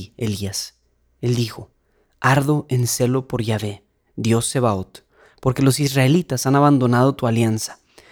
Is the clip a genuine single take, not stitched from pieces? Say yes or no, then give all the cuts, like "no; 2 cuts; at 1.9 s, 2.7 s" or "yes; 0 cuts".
yes; 0 cuts